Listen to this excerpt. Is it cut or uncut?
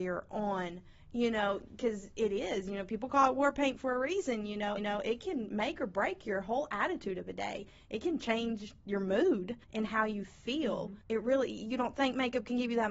cut